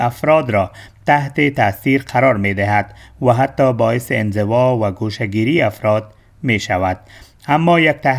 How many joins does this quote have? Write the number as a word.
zero